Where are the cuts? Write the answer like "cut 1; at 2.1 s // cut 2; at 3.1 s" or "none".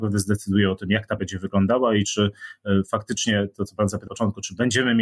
cut 1; at 1.2 s // cut 2; at 4.1 s